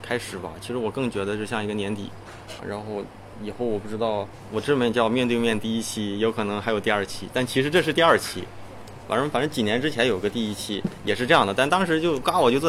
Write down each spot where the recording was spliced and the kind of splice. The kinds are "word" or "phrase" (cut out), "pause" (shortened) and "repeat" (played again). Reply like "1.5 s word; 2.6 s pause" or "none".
2.6 s word